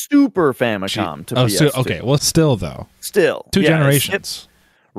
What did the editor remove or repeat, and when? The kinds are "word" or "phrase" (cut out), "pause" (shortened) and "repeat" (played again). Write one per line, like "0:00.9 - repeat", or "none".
0:02.2 - word